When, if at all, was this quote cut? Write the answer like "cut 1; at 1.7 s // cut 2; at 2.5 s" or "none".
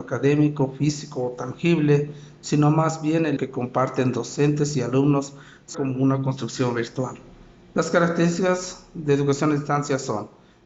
cut 1; at 3.4 s // cut 2; at 5.7 s